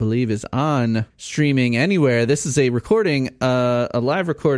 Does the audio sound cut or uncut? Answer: cut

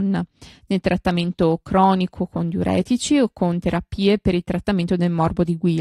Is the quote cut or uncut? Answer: uncut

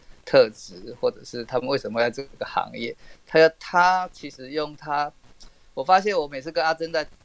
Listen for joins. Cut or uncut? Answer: uncut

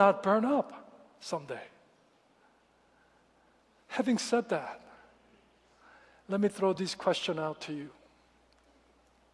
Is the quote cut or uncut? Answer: uncut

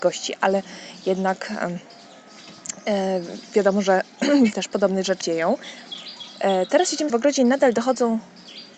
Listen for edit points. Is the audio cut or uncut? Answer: cut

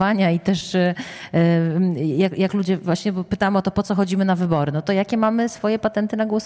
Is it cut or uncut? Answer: uncut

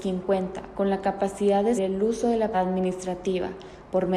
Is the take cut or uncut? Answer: cut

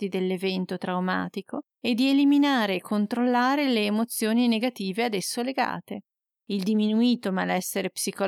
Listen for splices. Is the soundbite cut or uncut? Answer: cut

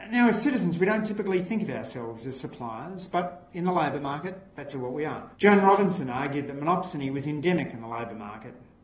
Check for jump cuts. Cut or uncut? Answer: cut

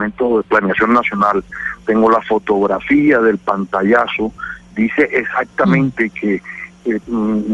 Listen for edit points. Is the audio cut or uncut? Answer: uncut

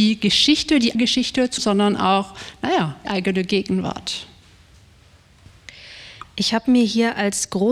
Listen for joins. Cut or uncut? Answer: cut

